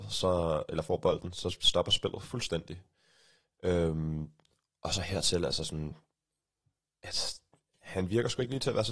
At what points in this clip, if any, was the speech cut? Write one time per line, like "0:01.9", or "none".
none